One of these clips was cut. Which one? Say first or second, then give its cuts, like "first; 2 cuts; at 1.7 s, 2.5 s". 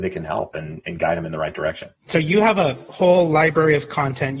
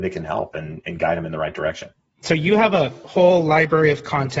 first; 1 cut; at 2.0 s